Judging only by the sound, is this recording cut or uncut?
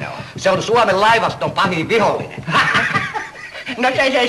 uncut